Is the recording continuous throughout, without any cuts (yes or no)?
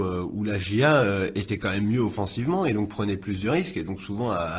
yes